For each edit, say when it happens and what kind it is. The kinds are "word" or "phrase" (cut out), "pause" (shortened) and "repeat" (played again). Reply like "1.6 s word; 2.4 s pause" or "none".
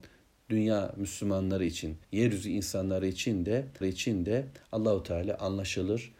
2.0 s pause; 3.8 s repeat